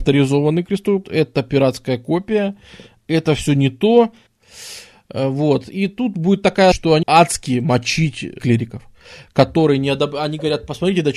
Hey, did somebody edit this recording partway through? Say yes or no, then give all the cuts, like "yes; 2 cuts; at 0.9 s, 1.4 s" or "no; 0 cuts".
yes; 4 cuts; at 1.0 s, 6.7 s, 7.0 s, 8.4 s